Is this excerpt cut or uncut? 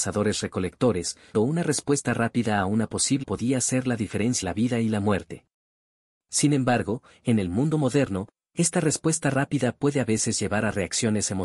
cut